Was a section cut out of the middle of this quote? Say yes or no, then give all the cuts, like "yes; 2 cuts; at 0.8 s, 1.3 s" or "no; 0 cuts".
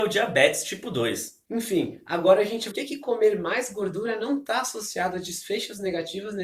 yes; 1 cut; at 2.7 s